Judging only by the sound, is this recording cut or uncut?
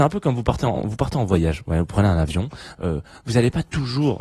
uncut